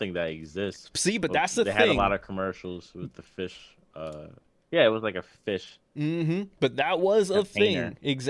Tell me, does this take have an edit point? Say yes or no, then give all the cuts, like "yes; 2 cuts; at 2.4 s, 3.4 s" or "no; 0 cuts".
no; 0 cuts